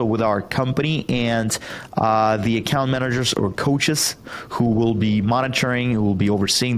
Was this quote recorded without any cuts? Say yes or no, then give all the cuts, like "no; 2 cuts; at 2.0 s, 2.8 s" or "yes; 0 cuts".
yes; 0 cuts